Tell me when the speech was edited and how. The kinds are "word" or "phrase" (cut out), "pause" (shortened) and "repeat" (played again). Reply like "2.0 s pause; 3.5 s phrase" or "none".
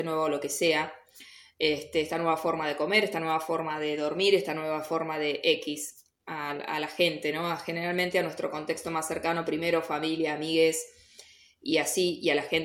none